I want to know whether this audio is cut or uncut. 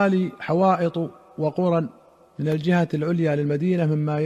uncut